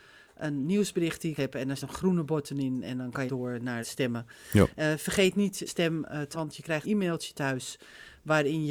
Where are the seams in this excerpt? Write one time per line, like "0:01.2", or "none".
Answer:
0:01.4
0:01.8
0:03.3
0:03.8
0:05.7
0:06.3
0:06.8